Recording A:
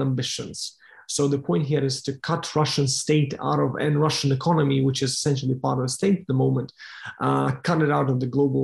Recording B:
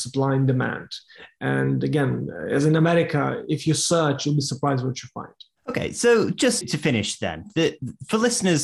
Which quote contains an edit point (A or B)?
B